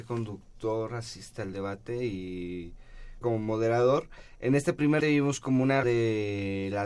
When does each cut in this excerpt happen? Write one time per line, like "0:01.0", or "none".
0:03.2
0:05.0
0:05.8